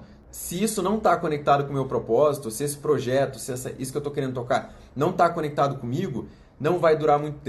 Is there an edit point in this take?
no; 0 cuts

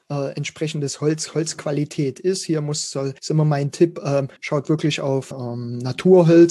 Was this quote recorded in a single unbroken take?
no; 3 cuts; at 3.2 s, 4.4 s, 5.3 s

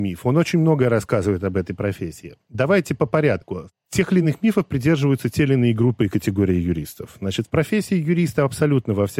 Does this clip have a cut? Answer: no; 0 cuts

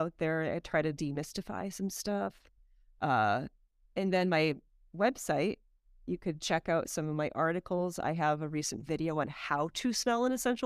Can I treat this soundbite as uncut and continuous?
yes; 0 cuts

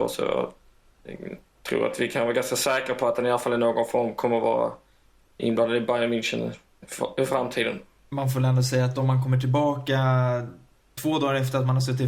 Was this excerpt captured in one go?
yes; 0 cuts

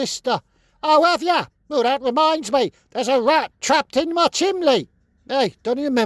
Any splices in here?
yes; 1 cut; at 1.6 s

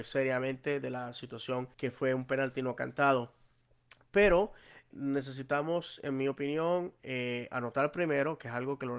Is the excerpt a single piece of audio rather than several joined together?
no; 2 cuts; at 1.7 s, 4.9 s

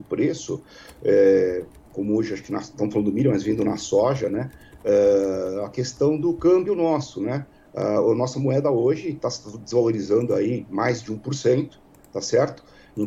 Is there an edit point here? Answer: no; 0 cuts

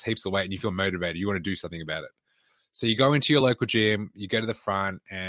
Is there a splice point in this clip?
no; 0 cuts

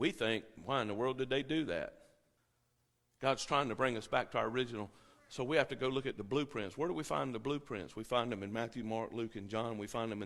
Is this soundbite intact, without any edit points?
yes; 0 cuts

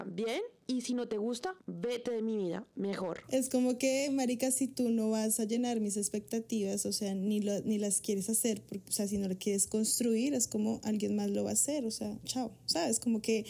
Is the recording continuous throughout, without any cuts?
no; 1 cut; at 1.6 s

